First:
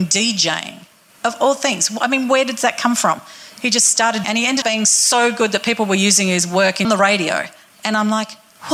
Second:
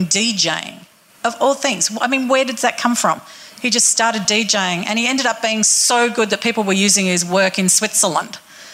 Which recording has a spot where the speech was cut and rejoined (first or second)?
first